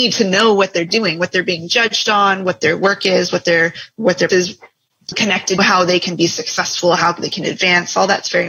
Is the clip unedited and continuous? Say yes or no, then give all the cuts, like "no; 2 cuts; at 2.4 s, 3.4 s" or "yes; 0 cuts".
no; 2 cuts; at 4.3 s, 5.6 s